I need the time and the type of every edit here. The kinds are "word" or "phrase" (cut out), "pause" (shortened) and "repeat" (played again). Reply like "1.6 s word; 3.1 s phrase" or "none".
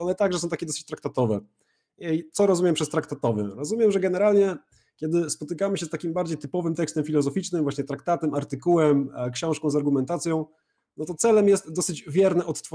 none